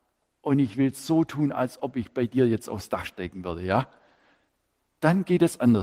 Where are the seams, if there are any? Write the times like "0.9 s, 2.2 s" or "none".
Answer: none